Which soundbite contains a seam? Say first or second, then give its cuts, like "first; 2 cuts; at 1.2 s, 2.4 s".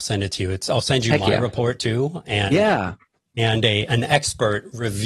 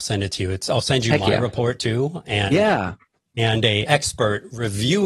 second; 1 cut; at 3.9 s